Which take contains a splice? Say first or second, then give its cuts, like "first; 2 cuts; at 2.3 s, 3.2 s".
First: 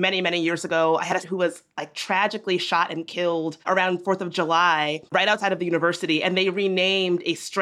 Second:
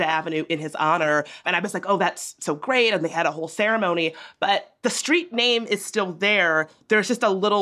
first; 3 cuts; at 1.2 s, 3.6 s, 5.1 s